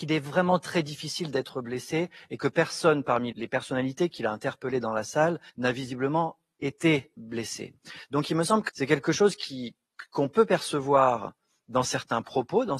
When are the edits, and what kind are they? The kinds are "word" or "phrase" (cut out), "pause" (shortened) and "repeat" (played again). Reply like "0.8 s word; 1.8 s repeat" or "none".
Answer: 3.3 s word; 5.5 s pause; 7.2 s word; 8.7 s word